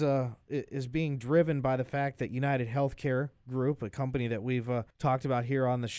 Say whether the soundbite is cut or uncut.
cut